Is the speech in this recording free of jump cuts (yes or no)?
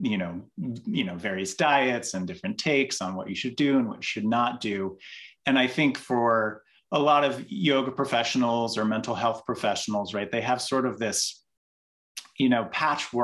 yes